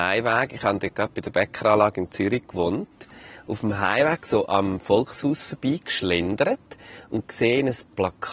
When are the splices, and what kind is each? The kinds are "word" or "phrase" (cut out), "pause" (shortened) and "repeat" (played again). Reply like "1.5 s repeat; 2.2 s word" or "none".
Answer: none